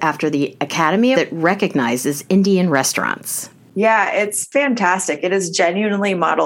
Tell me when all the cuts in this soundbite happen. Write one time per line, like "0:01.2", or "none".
0:01.1

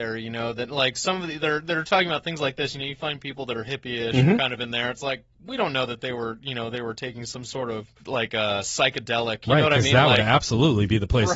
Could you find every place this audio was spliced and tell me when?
0:08.0

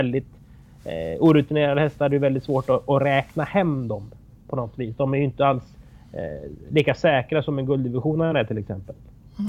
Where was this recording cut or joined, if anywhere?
none

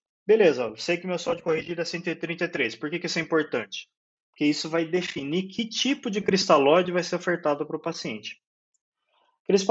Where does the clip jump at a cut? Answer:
none

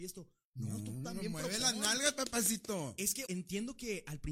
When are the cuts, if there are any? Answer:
0:03.3

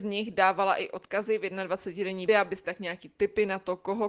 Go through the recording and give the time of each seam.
0:02.3
0:02.6

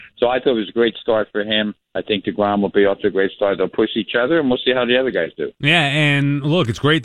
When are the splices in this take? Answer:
0:01.8

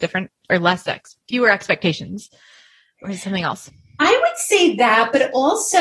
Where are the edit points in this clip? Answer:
none

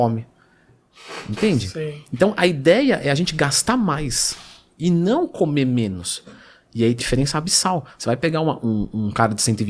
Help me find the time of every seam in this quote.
0:07.0
0:08.6

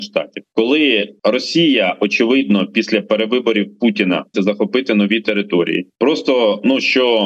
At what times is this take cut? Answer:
0:04.3

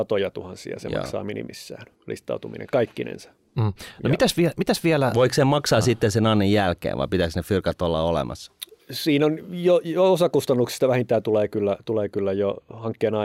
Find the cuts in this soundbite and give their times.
0:02.0

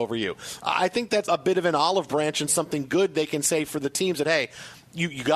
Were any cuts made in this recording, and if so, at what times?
0:01.2

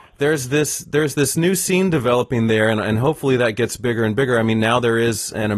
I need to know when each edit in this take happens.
none

